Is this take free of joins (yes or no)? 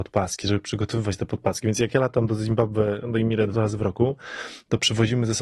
yes